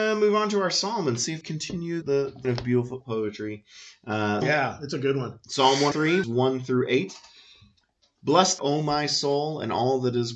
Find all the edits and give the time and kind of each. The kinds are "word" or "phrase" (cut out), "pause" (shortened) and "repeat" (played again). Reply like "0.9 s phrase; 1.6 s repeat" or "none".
1.4 s word; 2.0 s word; 2.4 s word; 3.0 s word; 4.4 s word; 5.9 s word; 6.2 s word; 8.6 s word